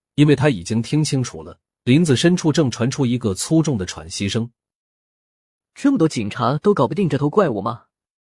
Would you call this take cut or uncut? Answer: cut